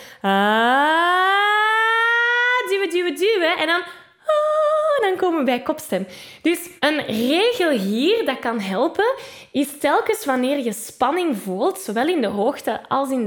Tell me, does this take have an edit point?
yes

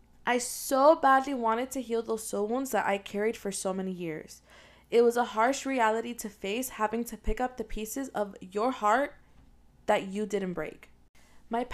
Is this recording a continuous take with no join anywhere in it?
yes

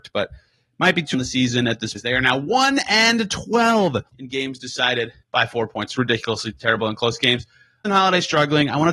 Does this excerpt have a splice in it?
yes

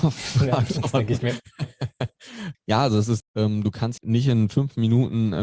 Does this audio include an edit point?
yes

